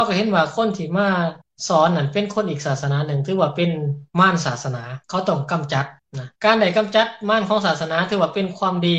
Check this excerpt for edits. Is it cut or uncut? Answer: cut